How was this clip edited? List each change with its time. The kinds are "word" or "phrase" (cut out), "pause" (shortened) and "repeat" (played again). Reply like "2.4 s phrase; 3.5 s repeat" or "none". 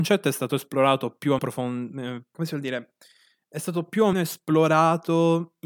1.4 s word; 2.3 s word; 4.1 s word